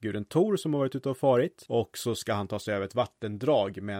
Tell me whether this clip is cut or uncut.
uncut